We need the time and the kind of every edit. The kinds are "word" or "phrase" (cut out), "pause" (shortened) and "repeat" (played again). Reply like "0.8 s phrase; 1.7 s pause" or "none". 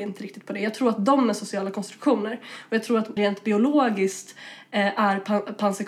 3.2 s word